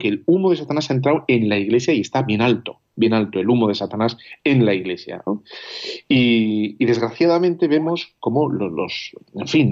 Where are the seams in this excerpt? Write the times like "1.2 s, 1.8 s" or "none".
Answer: none